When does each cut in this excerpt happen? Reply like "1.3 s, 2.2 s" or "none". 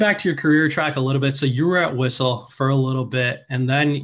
none